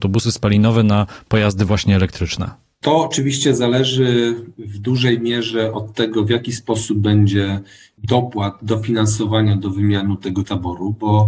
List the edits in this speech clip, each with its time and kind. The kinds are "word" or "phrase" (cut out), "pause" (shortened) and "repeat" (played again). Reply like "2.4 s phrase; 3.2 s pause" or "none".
none